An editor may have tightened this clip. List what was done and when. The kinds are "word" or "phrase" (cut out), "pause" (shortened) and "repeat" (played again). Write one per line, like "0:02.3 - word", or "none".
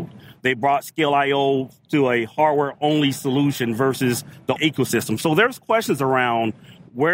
0:04.6 - word